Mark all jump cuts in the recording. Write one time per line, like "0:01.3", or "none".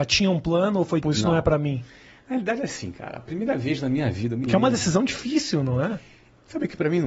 0:01.0